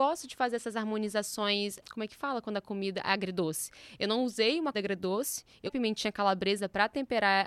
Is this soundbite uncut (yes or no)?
no